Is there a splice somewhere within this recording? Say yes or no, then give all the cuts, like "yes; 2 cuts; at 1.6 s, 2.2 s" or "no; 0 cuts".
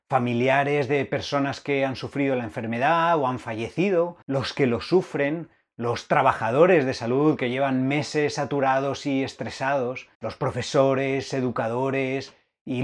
yes; 2 cuts; at 4.2 s, 10.1 s